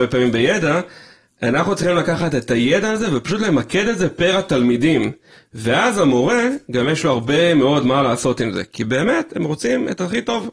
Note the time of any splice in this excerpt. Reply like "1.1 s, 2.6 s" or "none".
none